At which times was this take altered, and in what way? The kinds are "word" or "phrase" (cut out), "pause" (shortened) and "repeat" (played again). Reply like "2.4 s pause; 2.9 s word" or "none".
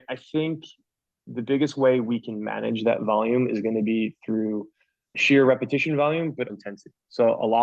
5.1 s word; 6.5 s word